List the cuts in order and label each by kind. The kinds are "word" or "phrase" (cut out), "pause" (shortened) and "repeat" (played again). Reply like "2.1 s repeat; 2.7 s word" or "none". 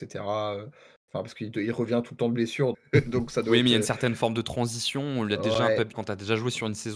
2.7 s word; 5.9 s word